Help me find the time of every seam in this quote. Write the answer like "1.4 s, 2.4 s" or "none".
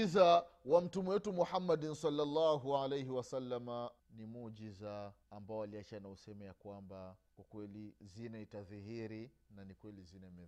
4.0 s, 5.2 s, 7.3 s